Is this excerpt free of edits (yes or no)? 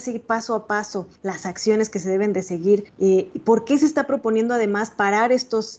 no